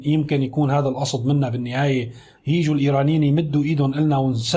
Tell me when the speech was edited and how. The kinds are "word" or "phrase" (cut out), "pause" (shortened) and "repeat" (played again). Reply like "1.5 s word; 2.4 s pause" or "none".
none

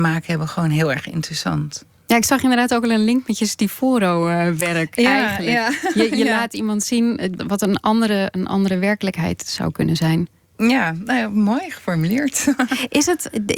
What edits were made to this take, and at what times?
7.4 s word

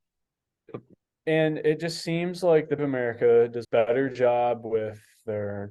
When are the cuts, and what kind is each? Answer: 0.9 s pause; 2.8 s word; 3.6 s word

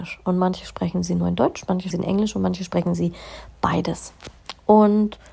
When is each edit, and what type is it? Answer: 1.9 s word

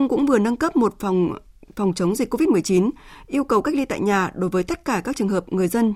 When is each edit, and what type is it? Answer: none

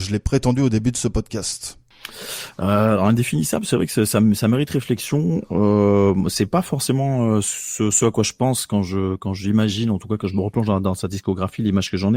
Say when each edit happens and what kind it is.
none

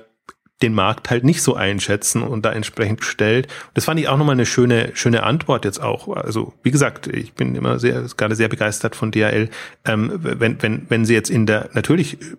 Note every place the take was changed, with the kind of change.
2.2 s word; 3.0 s phrase

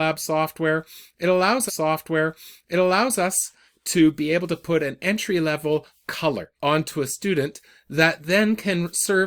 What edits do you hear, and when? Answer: 1.7 s repeat; 6.5 s pause

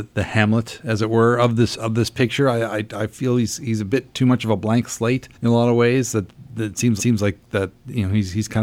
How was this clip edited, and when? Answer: 5.3 s pause; 7.0 s repeat

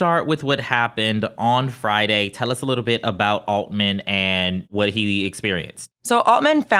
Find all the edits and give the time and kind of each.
none

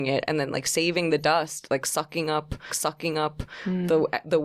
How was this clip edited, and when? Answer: 2.7 s repeat

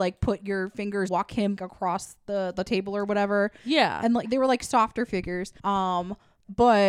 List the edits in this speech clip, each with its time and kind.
1.1 s word; 1.6 s word; 4.2 s word; 5.6 s pause

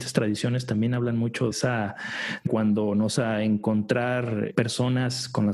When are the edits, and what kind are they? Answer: 1.5 s word; 2.5 s phrase; 3.2 s word; 4.5 s word

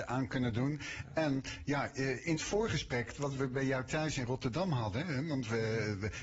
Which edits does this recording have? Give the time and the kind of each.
2.4 s word

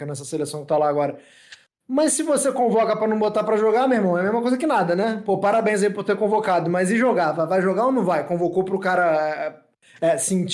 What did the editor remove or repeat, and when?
none

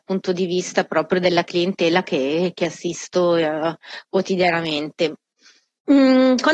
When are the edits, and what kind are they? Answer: none

